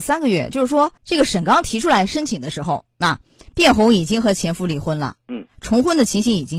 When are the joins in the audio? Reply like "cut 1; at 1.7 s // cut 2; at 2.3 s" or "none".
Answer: cut 1; at 1.0 s